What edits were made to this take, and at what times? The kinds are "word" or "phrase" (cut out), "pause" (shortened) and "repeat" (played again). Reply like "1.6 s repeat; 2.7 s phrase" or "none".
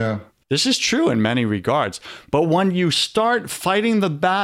none